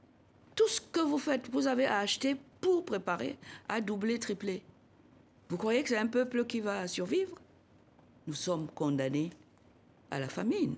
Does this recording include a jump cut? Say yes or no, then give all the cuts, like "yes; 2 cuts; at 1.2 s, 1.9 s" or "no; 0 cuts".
no; 0 cuts